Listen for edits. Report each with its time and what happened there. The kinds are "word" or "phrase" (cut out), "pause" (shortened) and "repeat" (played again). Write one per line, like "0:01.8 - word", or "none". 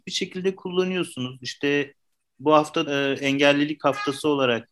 0:02.9 - word

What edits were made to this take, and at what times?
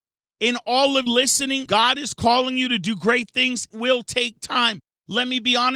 0:01.1 - word
0:01.7 - word
0:03.7 - word

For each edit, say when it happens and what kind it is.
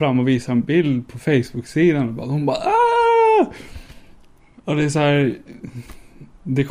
none

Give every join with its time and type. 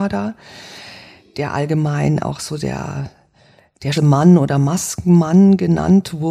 0:03.9 - word

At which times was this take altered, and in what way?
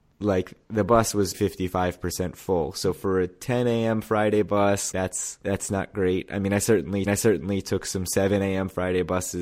0:01.3 - word
0:04.9 - word
0:05.4 - pause
0:07.1 - repeat

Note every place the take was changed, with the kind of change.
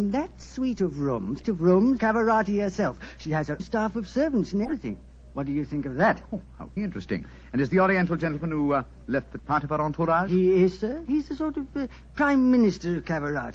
0:01.4 - phrase
0:02.0 - phrase
0:03.6 - word
0:06.8 - word
0:09.4 - phrase

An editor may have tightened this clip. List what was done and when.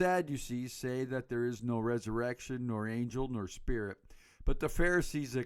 none

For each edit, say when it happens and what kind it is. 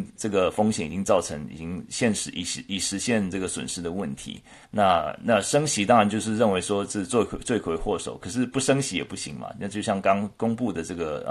0:04.6 - pause

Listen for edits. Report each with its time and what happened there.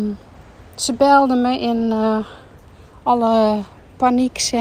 none

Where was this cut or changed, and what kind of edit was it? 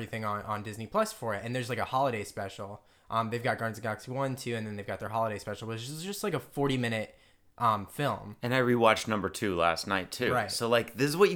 none

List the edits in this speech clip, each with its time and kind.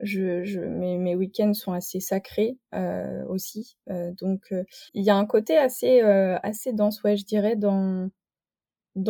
0:04.9 - pause

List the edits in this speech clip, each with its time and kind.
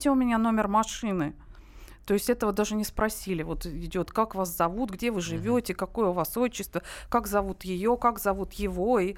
none

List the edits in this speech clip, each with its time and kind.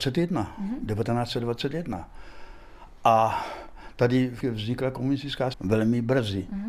0:04.4 - word
0:05.5 - word

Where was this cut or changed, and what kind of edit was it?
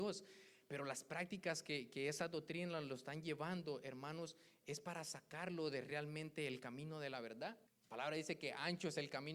0:07.7 - pause

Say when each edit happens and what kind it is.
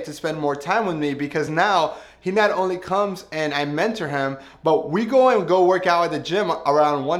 none

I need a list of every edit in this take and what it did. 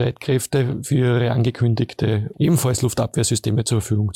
0:02.3 - word

